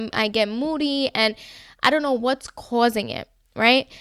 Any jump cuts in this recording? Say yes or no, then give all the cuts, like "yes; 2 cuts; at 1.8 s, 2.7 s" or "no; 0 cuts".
no; 0 cuts